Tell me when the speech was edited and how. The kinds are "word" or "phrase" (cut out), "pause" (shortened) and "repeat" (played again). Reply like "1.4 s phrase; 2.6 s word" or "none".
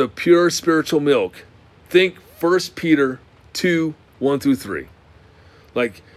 none